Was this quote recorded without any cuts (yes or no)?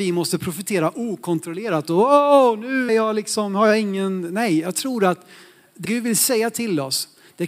no